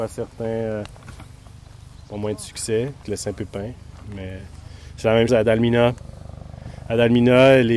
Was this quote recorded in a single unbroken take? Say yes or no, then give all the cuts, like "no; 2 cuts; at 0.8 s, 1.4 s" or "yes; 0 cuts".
no; 2 cuts; at 3.0 s, 5.3 s